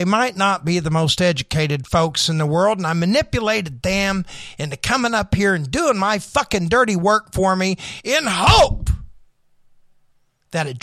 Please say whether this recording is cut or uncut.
uncut